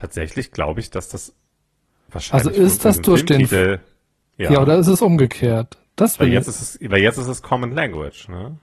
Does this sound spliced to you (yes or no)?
no